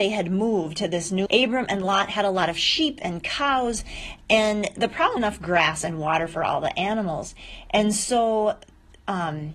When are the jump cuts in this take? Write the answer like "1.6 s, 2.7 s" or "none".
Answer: 1.3 s, 5.2 s